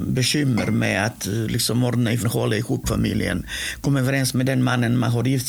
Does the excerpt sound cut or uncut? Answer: cut